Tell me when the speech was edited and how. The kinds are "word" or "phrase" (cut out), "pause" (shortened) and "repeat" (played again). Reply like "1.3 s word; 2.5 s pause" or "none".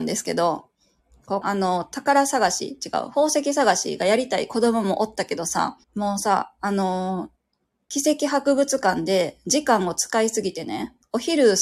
1.4 s phrase; 5.8 s pause; 7.6 s pause